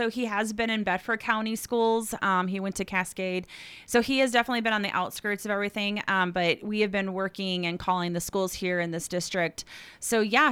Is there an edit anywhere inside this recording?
no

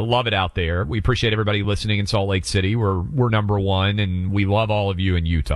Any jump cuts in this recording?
no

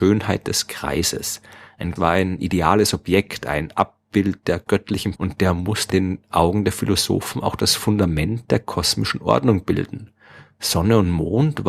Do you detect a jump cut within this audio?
yes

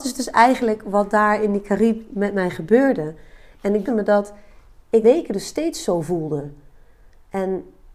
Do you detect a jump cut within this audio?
yes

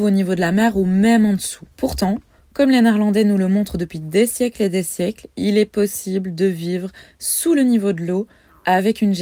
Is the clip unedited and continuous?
no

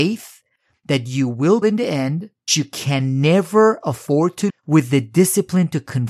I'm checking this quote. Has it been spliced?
yes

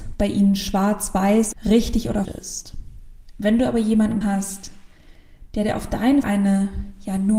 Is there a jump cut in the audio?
yes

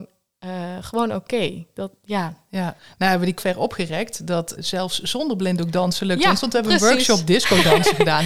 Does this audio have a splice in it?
yes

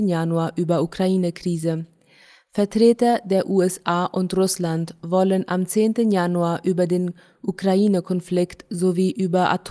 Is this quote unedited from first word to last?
yes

